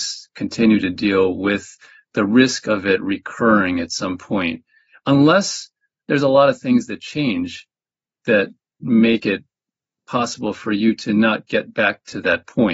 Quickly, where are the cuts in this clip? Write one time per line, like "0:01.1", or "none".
none